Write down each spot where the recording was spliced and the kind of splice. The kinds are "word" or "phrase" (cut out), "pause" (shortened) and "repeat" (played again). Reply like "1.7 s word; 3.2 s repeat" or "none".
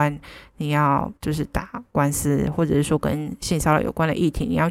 1.2 s pause